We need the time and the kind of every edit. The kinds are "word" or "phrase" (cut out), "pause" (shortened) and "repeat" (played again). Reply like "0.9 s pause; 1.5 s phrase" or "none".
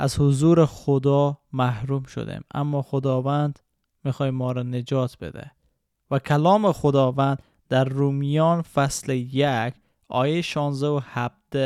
none